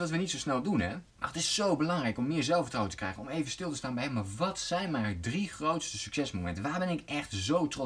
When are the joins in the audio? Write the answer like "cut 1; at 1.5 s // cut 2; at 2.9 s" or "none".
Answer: cut 1; at 1.1 s